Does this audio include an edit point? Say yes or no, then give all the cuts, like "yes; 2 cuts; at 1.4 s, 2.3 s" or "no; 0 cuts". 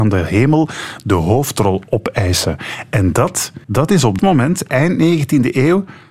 yes; 2 cuts; at 3.6 s, 4.2 s